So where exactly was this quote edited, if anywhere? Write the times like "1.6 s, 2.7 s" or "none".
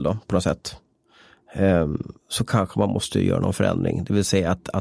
2.2 s